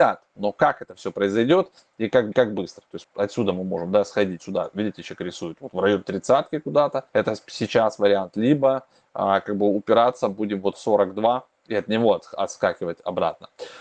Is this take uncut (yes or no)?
no